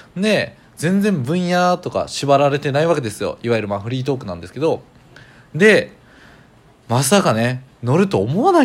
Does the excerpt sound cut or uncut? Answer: uncut